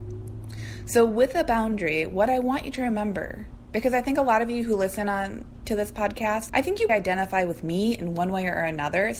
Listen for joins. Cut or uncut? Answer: cut